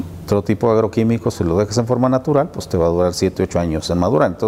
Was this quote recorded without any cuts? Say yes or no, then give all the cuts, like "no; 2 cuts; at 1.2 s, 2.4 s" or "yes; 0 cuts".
yes; 0 cuts